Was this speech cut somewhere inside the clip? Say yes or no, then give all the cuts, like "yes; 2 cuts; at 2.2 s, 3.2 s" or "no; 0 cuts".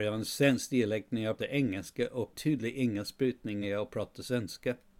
yes; 3 cuts; at 1.4 s, 2.3 s, 3.6 s